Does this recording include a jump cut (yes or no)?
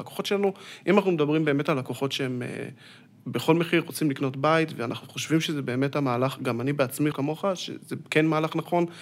yes